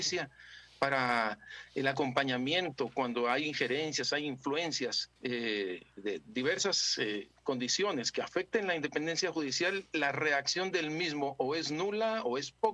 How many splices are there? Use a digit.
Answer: 1